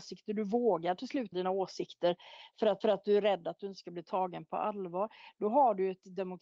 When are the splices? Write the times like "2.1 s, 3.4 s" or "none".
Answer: 1.3 s, 2.8 s